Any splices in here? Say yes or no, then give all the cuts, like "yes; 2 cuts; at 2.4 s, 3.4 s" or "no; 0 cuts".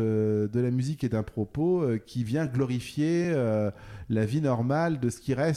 no; 0 cuts